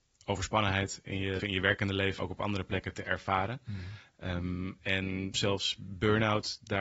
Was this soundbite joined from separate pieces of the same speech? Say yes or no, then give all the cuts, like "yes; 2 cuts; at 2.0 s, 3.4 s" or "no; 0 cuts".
yes; 3 cuts; at 1.4 s, 2.2 s, 5.3 s